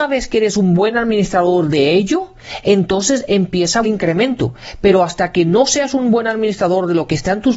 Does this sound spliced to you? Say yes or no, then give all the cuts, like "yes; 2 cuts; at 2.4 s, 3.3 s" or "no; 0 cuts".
yes; 1 cut; at 3.8 s